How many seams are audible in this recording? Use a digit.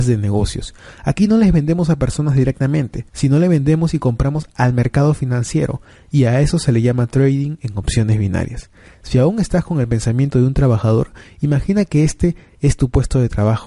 1